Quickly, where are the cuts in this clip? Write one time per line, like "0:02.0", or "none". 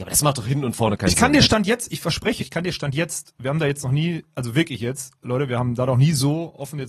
0:02.4